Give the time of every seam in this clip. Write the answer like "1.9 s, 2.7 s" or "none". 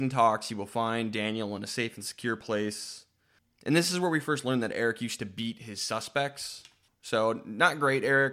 none